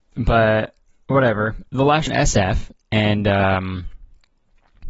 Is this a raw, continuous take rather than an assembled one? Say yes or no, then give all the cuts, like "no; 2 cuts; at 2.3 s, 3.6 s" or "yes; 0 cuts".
no; 2 cuts; at 1.7 s, 2.1 s